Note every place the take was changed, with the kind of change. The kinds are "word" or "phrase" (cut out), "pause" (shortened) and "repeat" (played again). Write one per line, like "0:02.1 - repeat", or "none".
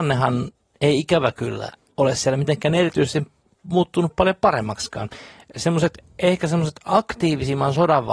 none

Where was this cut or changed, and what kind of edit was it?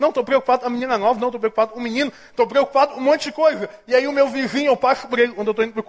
none

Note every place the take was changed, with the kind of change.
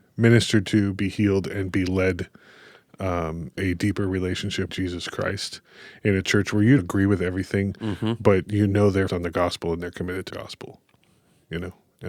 0:03.6 - word
0:04.7 - word
0:06.8 - word
0:09.1 - word
0:10.3 - word

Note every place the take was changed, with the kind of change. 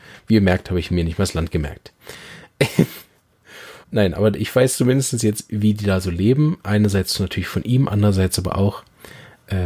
0:03.8 - pause

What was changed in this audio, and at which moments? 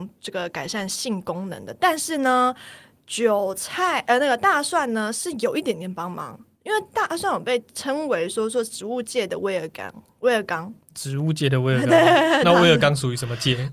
none

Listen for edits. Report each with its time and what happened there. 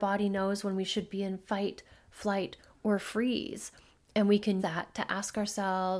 0:04.6 - word

